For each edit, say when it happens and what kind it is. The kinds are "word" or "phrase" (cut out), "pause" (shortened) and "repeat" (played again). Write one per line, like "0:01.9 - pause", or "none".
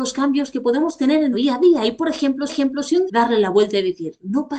0:01.3 - word
0:02.5 - repeat
0:03.1 - phrase